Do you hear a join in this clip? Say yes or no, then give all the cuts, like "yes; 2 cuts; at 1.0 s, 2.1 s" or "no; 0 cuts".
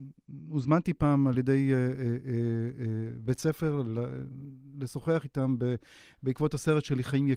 no; 0 cuts